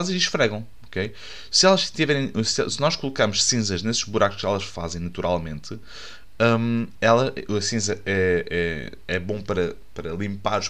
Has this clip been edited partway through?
no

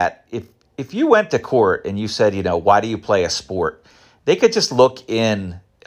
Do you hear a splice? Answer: no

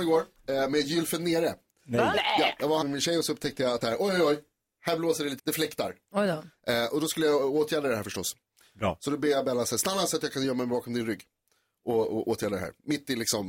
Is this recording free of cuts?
no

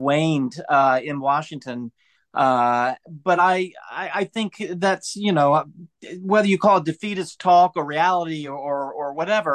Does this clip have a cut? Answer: no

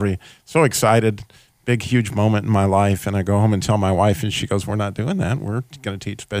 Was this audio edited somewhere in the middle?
no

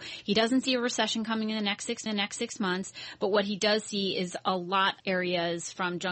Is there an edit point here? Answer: yes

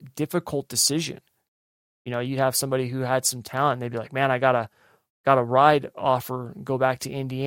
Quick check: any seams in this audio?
no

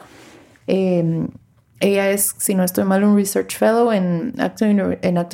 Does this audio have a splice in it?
no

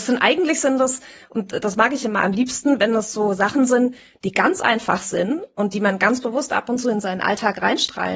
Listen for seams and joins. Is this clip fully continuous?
yes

